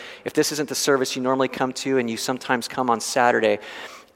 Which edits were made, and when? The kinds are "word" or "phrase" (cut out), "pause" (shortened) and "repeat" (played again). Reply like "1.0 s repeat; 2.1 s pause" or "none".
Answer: none

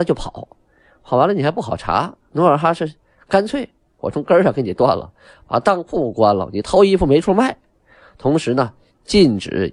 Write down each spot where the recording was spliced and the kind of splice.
none

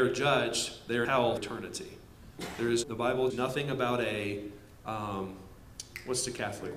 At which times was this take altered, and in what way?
1.0 s word; 1.4 s word; 2.8 s word; 3.3 s word

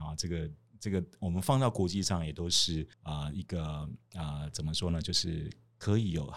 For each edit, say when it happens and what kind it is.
2.9 s pause

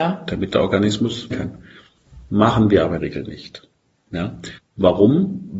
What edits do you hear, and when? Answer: 1.3 s word; 3.0 s word; 4.6 s pause

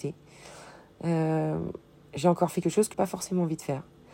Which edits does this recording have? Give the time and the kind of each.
2.6 s word; 2.9 s word

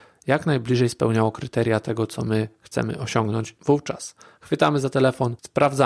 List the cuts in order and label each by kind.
none

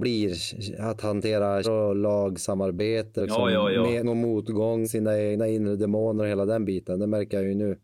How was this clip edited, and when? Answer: 1.6 s word; 3.2 s word; 4.0 s word; 4.8 s word

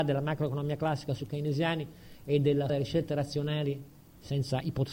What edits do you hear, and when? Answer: 2.7 s word

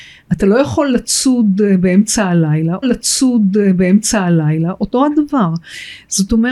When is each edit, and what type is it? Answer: 2.8 s repeat

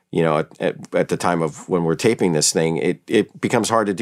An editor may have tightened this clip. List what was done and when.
none

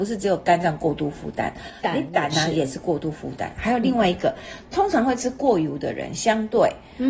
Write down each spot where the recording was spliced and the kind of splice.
none

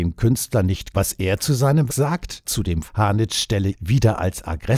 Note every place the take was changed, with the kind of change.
0.9 s word; 1.9 s word; 2.4 s word; 2.8 s word; 3.7 s word

